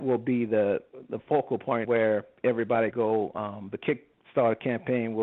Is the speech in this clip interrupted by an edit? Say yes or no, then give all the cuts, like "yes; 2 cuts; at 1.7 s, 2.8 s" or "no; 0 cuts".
yes; 2 cuts; at 1.8 s, 2.9 s